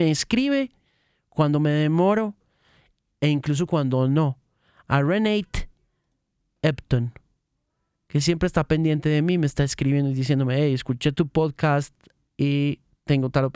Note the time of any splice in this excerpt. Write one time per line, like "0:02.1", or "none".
none